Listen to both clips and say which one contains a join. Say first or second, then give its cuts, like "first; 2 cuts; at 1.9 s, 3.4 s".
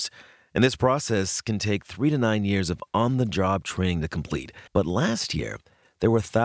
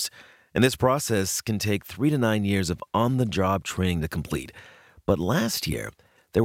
first; 1 cut; at 4.7 s